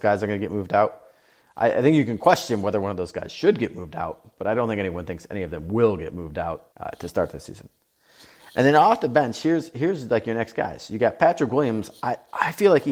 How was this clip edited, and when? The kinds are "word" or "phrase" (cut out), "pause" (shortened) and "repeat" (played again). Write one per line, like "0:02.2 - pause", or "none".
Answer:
0:06.7 - pause